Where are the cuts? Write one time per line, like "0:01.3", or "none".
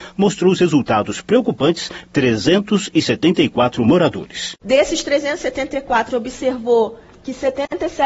0:02.0
0:06.1